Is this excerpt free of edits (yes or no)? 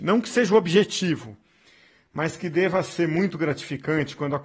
yes